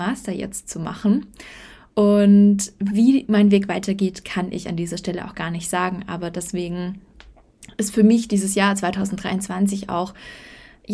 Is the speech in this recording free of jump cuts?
yes; 0 cuts

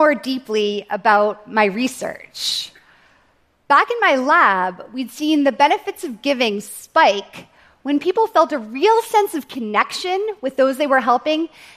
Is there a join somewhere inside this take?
no; 0 cuts

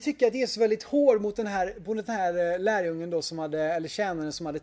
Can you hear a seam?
no; 0 cuts

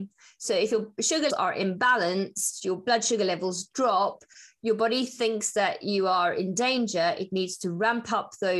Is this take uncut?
no; 1 cut; at 1.3 s

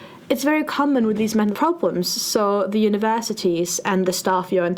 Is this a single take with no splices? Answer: no; 1 cut; at 1.5 s

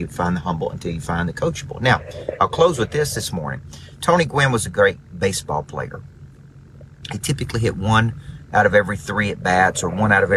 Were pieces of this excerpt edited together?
no; 0 cuts

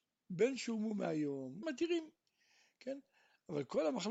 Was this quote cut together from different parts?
yes; 1 cut; at 1.6 s

